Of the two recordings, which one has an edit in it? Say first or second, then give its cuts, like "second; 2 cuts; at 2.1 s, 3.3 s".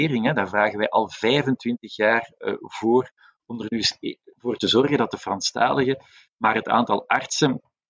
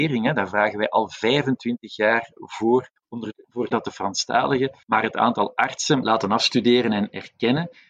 second; 6 cuts; at 2.4 s, 3.0 s, 3.3 s, 3.7 s, 4.8 s, 6.0 s